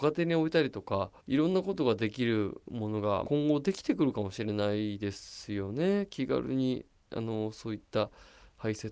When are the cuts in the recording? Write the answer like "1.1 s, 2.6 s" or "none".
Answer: 1.2 s, 3.2 s